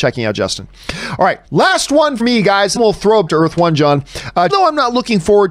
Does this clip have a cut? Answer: yes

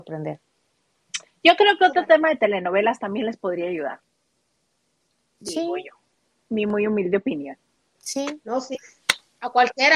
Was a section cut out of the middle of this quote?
no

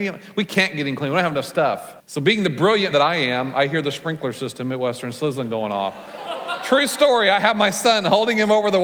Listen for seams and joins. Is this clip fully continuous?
no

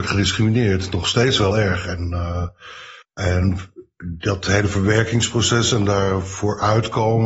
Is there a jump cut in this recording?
yes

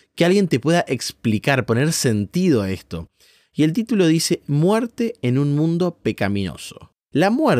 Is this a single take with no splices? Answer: yes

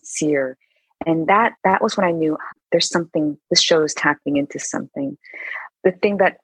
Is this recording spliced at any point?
yes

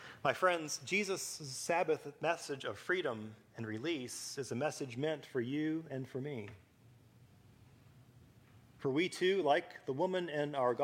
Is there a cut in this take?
no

